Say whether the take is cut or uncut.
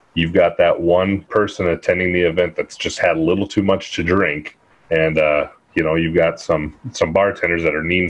cut